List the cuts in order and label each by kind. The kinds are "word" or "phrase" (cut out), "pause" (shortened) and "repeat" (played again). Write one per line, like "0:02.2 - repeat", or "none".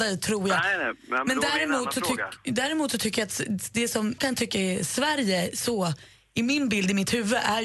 0:04.2 - word